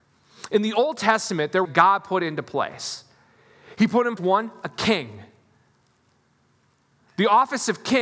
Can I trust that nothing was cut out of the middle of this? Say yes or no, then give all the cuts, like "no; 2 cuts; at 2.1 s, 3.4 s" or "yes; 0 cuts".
no; 2 cuts; at 1.6 s, 4.2 s